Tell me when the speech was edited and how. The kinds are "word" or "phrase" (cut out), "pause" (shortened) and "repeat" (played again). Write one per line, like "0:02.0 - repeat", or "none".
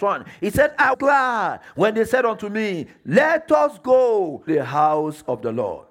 0:00.9 - word
0:04.5 - word